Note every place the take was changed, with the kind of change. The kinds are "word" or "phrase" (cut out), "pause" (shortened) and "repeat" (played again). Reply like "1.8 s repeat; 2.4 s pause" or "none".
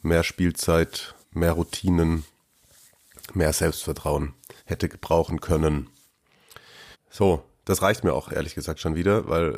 1.2 s pause; 4.6 s pause; 6.9 s pause